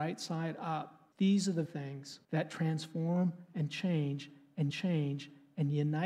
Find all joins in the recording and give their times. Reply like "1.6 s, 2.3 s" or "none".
1.1 s, 1.6 s, 2.2 s, 4.7 s